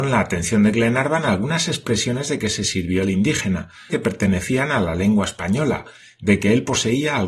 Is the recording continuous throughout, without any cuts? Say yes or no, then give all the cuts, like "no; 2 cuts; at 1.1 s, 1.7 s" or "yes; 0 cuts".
no; 1 cut; at 3.9 s